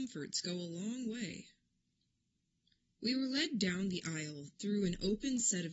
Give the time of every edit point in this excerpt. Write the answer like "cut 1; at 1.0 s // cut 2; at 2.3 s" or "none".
none